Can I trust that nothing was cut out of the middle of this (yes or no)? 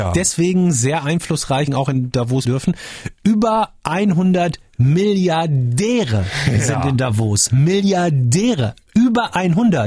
no